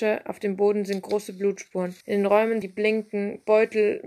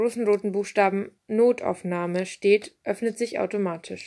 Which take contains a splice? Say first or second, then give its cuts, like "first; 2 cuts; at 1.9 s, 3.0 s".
first; 2 cuts; at 2.0 s, 2.6 s